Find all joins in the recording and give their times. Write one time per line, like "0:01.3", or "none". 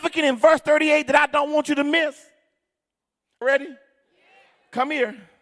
0:03.4